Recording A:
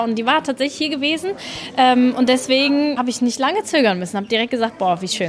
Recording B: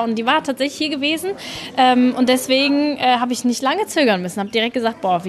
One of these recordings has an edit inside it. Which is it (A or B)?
A